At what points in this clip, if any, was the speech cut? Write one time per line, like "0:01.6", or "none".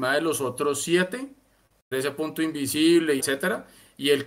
0:01.9
0:03.2